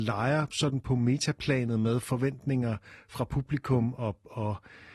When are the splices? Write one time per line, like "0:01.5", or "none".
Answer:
none